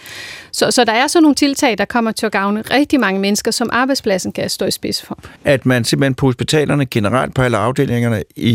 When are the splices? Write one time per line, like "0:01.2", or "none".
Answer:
0:05.4